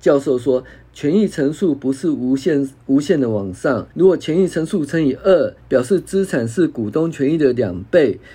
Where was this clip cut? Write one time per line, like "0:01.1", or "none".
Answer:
0:03.9
0:05.6

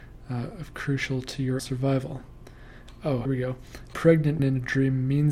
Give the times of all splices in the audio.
0:01.6
0:03.3
0:03.9
0:04.4

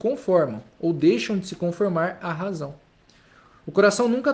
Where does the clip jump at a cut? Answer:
none

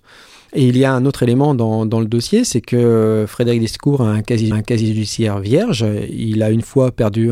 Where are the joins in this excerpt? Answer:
0:04.5

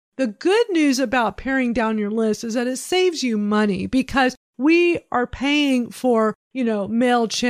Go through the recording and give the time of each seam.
none

